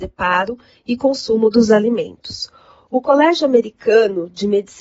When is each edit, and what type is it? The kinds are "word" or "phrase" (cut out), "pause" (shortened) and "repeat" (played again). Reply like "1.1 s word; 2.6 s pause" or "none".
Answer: none